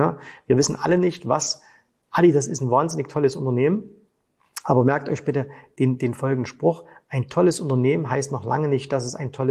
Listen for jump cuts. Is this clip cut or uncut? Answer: uncut